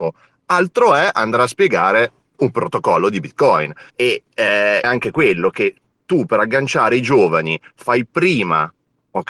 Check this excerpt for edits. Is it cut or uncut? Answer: cut